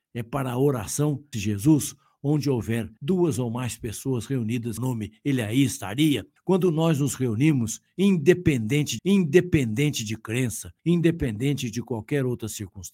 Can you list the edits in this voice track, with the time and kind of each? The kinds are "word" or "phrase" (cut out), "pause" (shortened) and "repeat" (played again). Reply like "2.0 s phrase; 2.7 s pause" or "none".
1.3 s phrase; 3.0 s pause; 4.8 s phrase; 6.4 s pause; 9.0 s repeat; 10.8 s pause